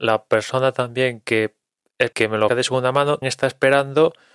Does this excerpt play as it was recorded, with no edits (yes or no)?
no